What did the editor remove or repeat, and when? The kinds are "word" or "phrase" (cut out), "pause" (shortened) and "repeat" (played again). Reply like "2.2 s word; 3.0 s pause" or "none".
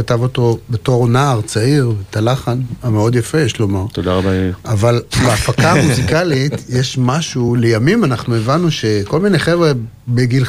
none